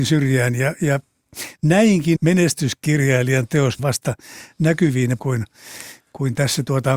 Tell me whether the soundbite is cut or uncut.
cut